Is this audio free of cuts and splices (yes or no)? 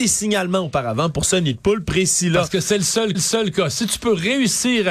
no